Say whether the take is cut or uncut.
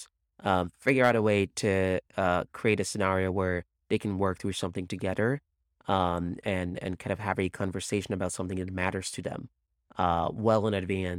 uncut